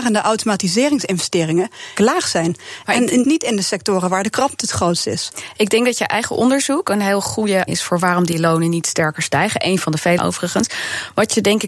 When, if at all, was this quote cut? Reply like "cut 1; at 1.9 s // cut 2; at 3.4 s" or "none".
cut 1; at 2.0 s // cut 2; at 3.2 s // cut 3; at 7.7 s // cut 4; at 10.2 s